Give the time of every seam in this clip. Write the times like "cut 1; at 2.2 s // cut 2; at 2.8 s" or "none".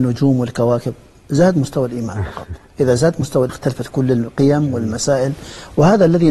cut 1; at 3.5 s